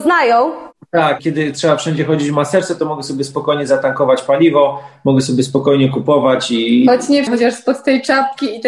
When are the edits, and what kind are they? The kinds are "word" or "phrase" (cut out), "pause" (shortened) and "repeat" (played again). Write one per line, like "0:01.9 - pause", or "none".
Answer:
0:01.2 - word
0:07.3 - word